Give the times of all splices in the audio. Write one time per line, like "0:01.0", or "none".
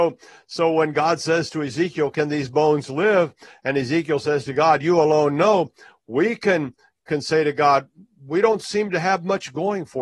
none